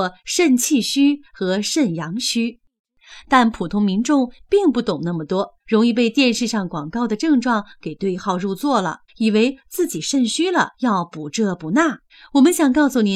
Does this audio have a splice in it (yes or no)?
yes